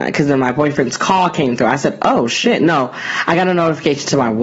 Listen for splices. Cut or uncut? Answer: uncut